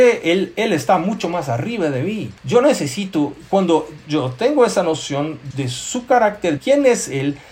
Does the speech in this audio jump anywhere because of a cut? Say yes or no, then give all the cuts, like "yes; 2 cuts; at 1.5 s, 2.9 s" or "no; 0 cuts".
yes; 3 cuts; at 2.4 s, 5.5 s, 6.6 s